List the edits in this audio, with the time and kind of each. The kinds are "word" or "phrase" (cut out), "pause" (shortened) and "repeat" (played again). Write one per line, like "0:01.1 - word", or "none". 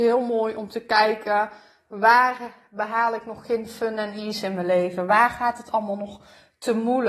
none